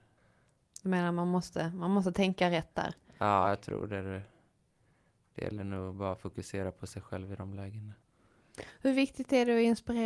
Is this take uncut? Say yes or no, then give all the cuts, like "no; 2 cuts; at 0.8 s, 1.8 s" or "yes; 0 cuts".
yes; 0 cuts